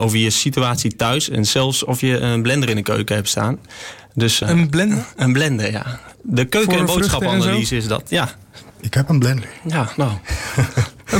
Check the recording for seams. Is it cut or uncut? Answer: cut